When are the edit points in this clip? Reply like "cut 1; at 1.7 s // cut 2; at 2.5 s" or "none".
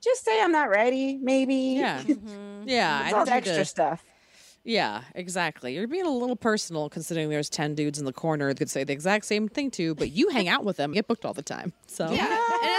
cut 1; at 3.2 s // cut 2; at 8.6 s // cut 3; at 10.9 s